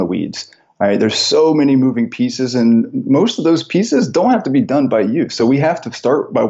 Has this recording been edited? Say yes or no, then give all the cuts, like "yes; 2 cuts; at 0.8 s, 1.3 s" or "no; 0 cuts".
no; 0 cuts